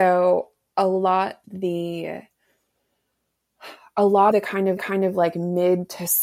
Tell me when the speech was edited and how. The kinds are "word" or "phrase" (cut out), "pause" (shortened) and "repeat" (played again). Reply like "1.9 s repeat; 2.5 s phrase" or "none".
1.4 s word; 4.3 s word; 4.8 s repeat